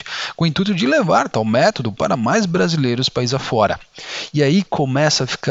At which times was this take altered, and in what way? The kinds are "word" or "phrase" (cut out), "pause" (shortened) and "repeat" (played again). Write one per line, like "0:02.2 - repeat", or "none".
none